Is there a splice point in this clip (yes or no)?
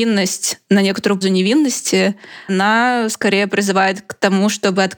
yes